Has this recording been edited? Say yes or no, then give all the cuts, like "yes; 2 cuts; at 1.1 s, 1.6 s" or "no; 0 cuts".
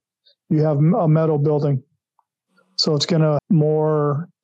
yes; 1 cut; at 3.4 s